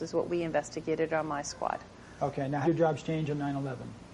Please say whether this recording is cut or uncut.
cut